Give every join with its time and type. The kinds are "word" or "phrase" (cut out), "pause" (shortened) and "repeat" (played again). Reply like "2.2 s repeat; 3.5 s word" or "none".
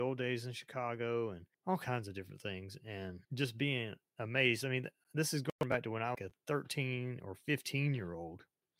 1.5 s pause; 3.2 s pause; 6.1 s phrase